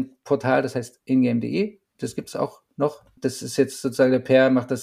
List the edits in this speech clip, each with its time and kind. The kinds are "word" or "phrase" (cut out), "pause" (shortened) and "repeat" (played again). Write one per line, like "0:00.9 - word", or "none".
0:01.9 - pause